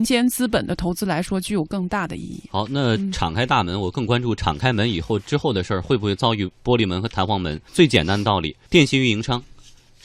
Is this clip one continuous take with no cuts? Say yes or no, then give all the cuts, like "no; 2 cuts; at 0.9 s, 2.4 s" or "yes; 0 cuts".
no; 2 cuts; at 7.7 s, 8.7 s